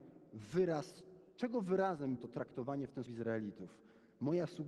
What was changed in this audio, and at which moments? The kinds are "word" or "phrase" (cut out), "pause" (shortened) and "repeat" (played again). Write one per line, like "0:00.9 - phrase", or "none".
0:01.3 - pause
0:02.2 - word
0:03.1 - word